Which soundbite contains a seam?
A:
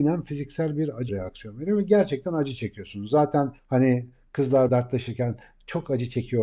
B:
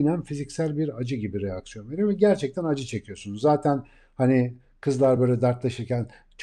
A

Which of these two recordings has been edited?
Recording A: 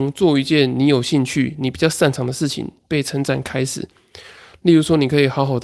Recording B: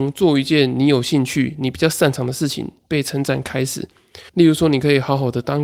B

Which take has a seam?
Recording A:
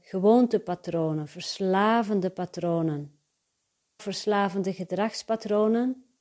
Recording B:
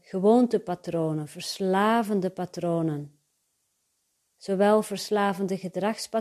A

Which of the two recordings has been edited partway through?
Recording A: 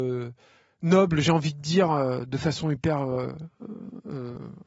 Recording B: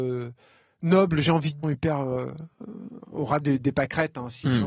B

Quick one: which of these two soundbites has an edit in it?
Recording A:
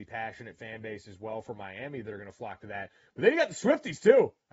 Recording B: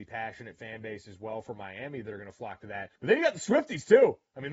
B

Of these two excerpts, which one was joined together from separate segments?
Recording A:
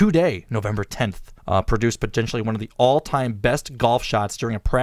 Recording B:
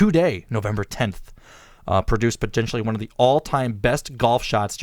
A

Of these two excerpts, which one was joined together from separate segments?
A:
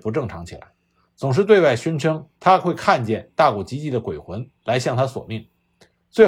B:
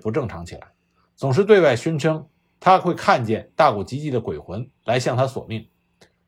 A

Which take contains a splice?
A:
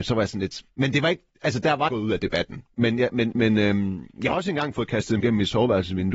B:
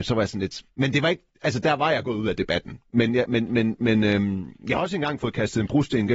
A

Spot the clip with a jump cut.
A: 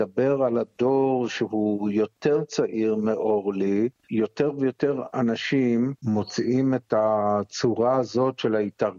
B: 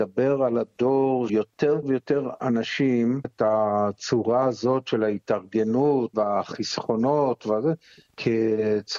B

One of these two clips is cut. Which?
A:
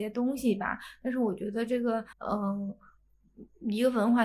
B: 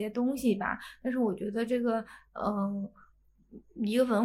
A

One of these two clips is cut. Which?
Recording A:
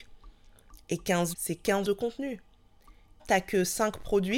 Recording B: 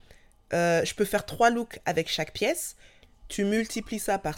A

